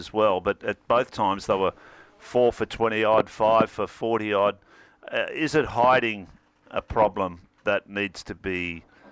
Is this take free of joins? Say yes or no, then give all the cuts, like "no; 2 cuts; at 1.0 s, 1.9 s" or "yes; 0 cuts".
yes; 0 cuts